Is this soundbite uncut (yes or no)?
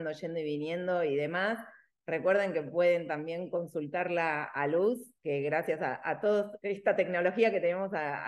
yes